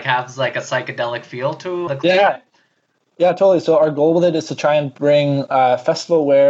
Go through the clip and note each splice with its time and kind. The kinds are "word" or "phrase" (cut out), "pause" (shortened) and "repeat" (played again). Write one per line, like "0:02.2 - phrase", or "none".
0:01.9 - word